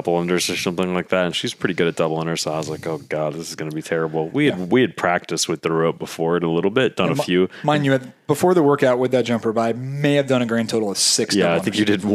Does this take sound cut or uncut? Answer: uncut